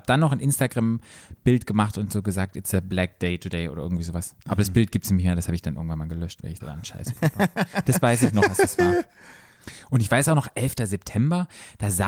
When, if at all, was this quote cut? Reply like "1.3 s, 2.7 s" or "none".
6.6 s